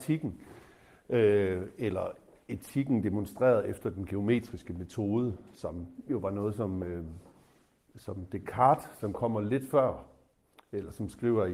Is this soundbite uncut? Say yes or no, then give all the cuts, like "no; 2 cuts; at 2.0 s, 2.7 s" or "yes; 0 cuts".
yes; 0 cuts